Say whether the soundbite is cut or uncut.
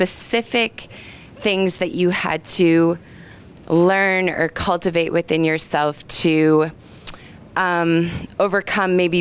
uncut